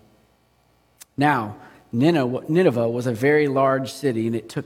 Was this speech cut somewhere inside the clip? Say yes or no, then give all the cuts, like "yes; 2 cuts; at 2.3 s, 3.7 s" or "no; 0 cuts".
no; 0 cuts